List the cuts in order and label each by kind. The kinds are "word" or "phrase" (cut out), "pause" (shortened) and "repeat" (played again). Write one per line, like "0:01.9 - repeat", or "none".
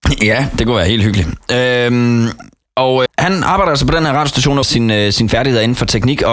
0:03.1 - word
0:04.6 - word